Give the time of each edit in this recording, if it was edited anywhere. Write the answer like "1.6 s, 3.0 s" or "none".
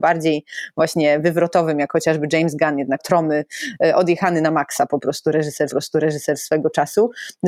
3.0 s, 5.7 s